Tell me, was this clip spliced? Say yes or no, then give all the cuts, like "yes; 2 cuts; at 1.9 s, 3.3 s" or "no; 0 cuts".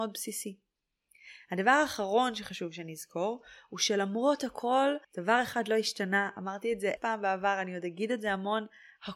yes; 2 cuts; at 5.0 s, 7.0 s